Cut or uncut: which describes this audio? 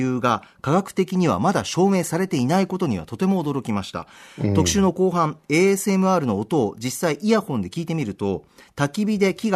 uncut